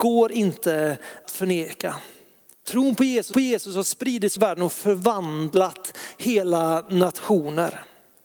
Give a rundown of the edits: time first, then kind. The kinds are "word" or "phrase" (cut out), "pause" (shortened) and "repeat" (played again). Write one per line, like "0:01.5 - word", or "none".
0:01.2 - word
0:03.3 - repeat
0:04.4 - word